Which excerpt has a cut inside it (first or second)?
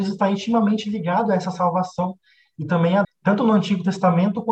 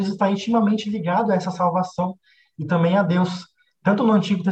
first